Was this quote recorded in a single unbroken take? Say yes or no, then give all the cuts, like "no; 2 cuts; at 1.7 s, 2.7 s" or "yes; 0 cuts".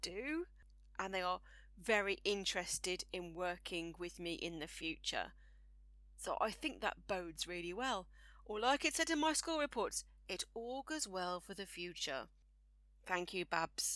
yes; 0 cuts